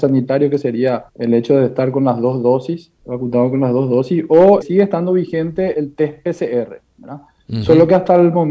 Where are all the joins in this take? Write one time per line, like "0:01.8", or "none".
0:01.1
0:03.0
0:04.6
0:05.7